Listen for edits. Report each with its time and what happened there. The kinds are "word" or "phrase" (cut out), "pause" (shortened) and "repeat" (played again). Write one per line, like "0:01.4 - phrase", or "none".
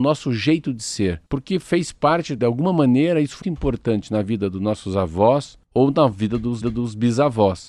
0:01.3 - pause
0:02.4 - word
0:03.4 - word
0:05.6 - pause
0:06.6 - repeat